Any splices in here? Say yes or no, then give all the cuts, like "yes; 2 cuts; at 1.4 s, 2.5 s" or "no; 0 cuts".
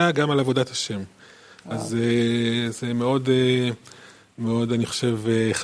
no; 0 cuts